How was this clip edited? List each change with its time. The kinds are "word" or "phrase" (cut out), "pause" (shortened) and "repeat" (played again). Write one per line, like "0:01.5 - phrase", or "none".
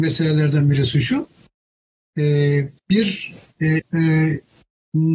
0:02.8 - pause
0:03.8 - word